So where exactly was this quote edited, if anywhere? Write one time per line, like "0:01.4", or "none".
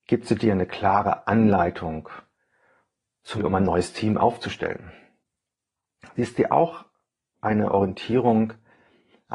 0:03.4